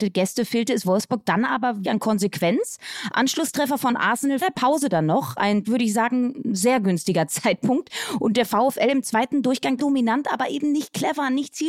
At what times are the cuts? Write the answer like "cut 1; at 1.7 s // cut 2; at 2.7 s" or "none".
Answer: cut 1; at 1.8 s // cut 2; at 4.4 s // cut 3; at 5.6 s // cut 4; at 9.8 s